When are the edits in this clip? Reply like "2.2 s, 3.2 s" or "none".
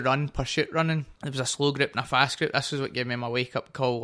1.2 s